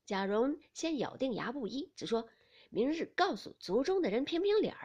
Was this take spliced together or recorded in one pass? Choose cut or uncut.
uncut